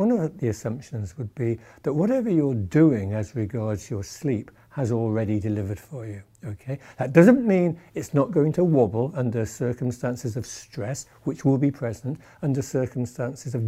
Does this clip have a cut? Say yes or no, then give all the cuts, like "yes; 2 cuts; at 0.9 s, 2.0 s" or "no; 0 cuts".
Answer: no; 0 cuts